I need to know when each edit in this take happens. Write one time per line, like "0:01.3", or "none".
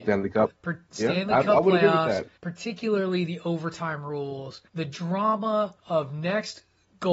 0:02.4
0:04.7
0:05.8